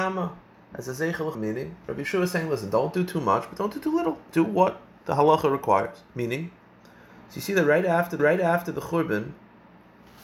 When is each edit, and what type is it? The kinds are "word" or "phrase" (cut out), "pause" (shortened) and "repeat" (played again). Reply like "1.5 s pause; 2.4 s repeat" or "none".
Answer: 1.3 s word; 6.1 s pause; 8.2 s repeat